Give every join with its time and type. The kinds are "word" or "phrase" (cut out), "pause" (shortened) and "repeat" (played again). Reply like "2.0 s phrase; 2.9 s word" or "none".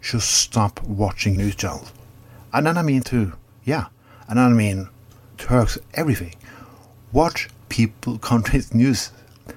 1.4 s word; 3.0 s word; 5.3 s word; 7.6 s word